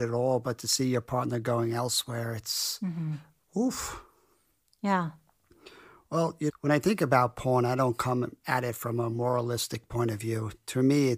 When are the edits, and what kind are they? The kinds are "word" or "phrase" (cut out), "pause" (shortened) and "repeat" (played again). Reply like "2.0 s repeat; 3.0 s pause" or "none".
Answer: 6.5 s phrase